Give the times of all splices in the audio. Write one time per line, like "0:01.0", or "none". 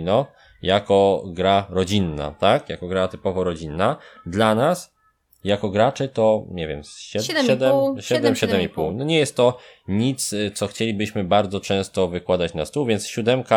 none